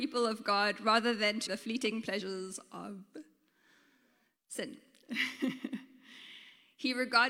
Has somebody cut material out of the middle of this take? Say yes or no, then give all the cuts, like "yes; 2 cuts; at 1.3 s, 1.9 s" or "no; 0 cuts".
yes; 1 cut; at 1.5 s